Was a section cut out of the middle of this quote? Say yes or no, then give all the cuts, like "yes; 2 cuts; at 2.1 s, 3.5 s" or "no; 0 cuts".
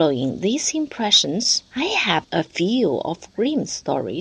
yes; 2 cuts; at 1.7 s, 2.2 s